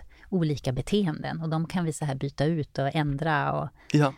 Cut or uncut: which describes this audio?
uncut